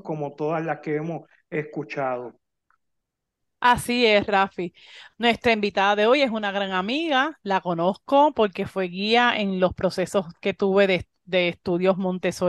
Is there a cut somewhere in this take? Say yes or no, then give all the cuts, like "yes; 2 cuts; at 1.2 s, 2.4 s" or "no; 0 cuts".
no; 0 cuts